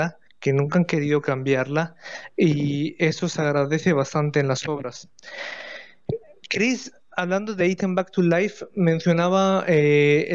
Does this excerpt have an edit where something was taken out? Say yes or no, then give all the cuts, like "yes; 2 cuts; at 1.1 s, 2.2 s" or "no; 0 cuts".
no; 0 cuts